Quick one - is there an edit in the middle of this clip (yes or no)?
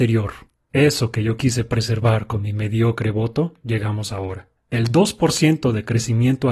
yes